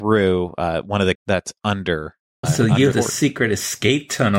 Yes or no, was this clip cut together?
yes